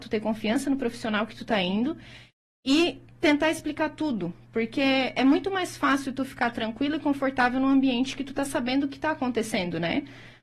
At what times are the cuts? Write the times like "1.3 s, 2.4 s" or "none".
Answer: none